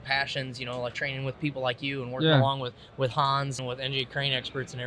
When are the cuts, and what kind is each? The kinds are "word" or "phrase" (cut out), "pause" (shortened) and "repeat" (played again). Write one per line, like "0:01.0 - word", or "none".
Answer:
0:03.6 - phrase